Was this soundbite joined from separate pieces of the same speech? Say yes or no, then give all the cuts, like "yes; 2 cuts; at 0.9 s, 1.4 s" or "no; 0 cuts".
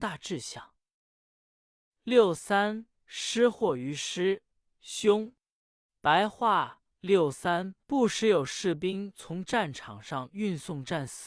yes; 3 cuts; at 3.0 s, 5.6 s, 7.8 s